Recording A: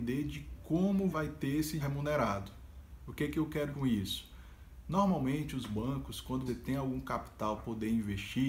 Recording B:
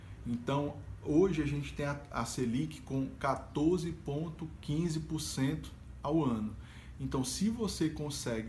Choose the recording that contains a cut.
A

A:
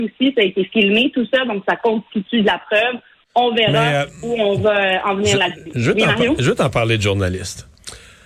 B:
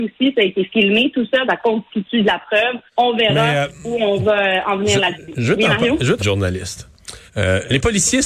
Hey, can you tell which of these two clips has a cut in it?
B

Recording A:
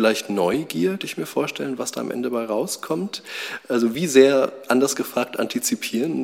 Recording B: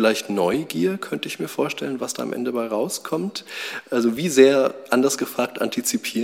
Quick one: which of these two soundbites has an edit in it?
A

